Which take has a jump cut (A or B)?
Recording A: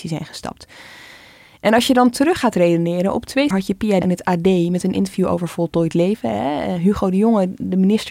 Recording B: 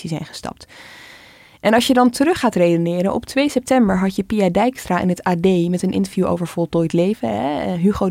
A